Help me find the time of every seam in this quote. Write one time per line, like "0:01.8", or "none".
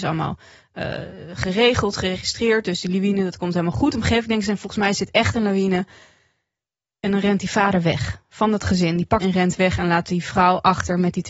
0:09.2